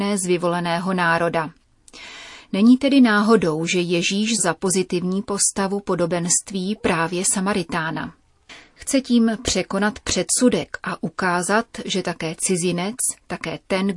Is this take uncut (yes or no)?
no